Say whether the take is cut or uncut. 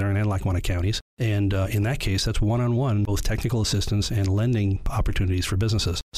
uncut